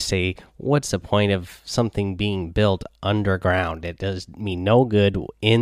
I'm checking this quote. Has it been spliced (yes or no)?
no